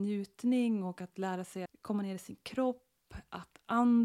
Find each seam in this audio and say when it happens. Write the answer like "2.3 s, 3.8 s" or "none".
1.7 s

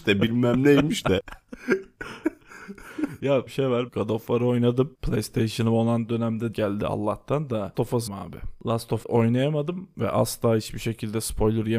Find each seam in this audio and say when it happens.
3.5 s, 3.9 s, 6.5 s, 7.7 s, 8.1 s, 9.0 s

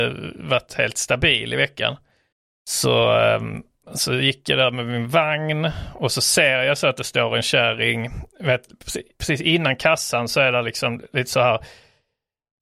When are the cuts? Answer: 2.3 s

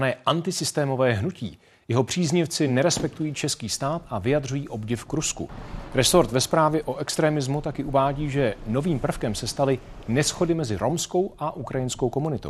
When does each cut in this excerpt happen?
none

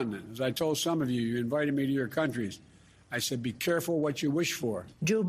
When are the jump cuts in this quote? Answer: none

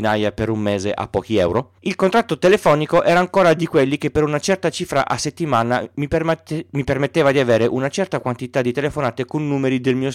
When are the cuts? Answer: 1.8 s

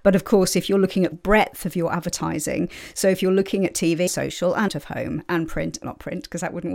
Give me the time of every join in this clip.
1.1 s, 4.1 s, 4.7 s, 5.8 s

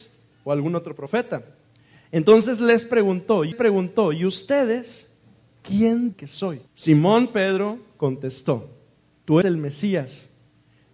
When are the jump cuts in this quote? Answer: 1.8 s, 3.5 s, 6.1 s, 6.7 s, 9.4 s

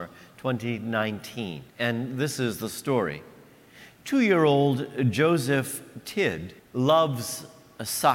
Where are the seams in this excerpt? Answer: 1.7 s, 6.6 s

